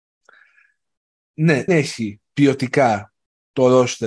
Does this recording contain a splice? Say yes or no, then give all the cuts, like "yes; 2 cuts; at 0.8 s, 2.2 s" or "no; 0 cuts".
yes; 1 cut; at 1.7 s